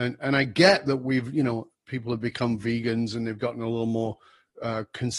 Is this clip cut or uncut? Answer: uncut